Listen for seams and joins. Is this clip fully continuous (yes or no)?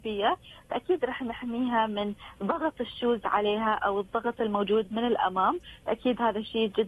yes